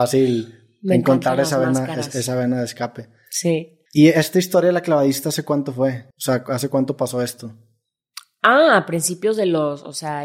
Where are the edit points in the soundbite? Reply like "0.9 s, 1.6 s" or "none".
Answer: 3.9 s, 6.1 s

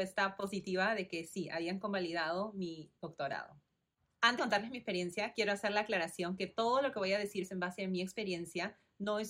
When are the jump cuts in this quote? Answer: 3.0 s, 4.4 s, 7.4 s

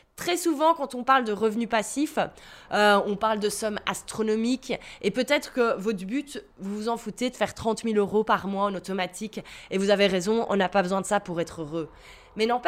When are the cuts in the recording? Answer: none

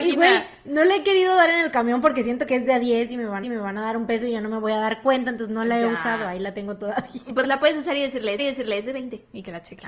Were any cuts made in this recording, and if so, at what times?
2.5 s, 3.4 s, 8.4 s

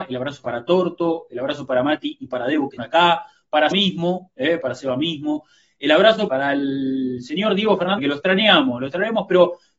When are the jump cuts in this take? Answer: 2.8 s, 3.7 s, 6.3 s, 8.0 s

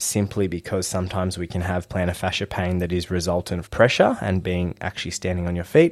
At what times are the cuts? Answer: 3.6 s

